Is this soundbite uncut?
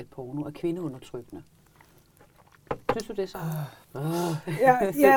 no; 1 cut; at 3.8 s

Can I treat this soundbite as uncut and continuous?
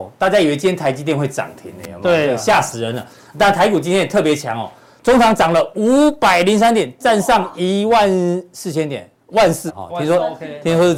no; 1 cut; at 9.7 s

